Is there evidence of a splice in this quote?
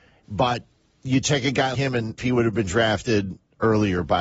yes; 2 cuts; at 1.7 s, 2.2 s

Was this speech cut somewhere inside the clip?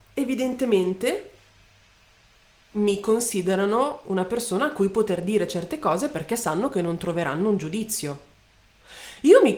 no; 0 cuts

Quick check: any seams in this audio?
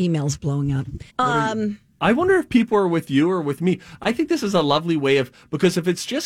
yes; 1 cut; at 1.1 s

